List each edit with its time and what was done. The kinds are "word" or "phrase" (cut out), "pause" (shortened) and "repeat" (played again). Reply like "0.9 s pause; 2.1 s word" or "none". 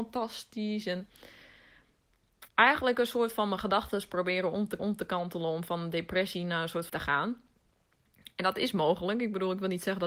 2.5 s pause; 4.8 s repeat; 6.9 s phrase